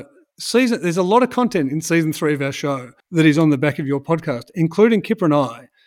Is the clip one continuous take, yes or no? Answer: no